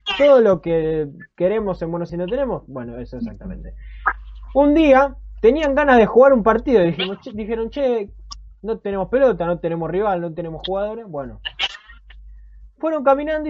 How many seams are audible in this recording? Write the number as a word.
one